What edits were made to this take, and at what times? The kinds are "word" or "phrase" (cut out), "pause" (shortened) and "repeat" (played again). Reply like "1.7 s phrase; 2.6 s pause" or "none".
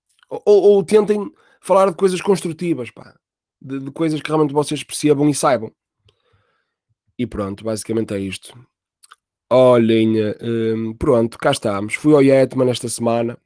none